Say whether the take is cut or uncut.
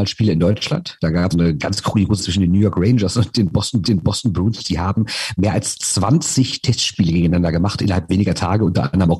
cut